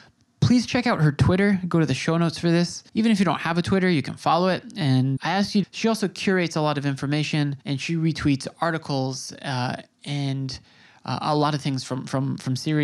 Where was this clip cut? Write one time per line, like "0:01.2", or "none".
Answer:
0:02.9
0:05.2
0:05.6
0:07.6